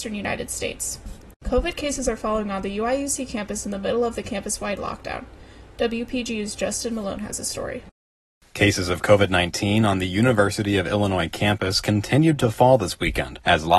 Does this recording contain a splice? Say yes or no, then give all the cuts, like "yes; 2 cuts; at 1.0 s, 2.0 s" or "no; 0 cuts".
yes; 1 cut; at 1.3 s